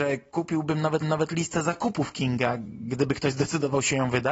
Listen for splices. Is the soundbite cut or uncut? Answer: cut